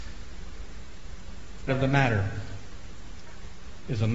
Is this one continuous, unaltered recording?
no; 1 cut; at 1.7 s

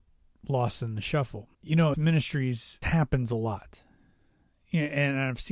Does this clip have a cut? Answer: yes; 3 cuts; at 1.5 s, 1.9 s, 2.8 s

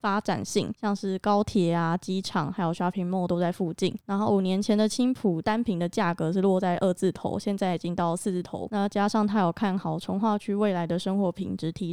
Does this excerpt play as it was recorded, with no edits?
yes; 0 cuts

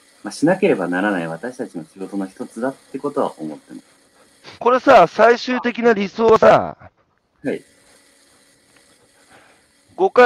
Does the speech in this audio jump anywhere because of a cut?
yes; 1 cut; at 4.6 s

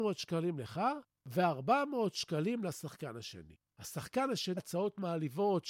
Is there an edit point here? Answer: yes; 1 cut; at 4.6 s

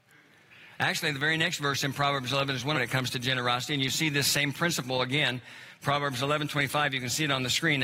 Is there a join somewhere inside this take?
yes; 1 cut; at 2.7 s

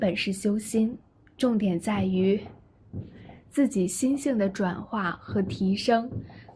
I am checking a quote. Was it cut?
no; 0 cuts

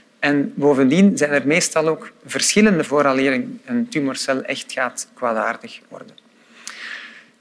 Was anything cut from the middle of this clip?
yes; 1 cut; at 2.8 s

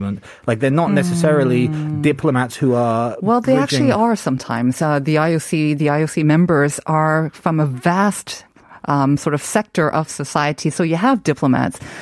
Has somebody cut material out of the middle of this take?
no; 0 cuts

